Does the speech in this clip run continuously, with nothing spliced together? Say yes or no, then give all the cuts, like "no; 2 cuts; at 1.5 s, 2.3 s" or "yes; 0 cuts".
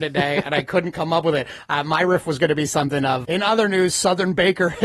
no; 1 cut; at 3.2 s